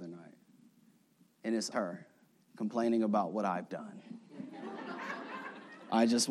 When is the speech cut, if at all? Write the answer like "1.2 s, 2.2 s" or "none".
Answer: 1.7 s, 2.3 s